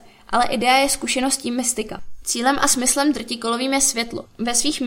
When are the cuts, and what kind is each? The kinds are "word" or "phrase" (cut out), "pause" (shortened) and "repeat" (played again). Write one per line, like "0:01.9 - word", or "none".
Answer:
none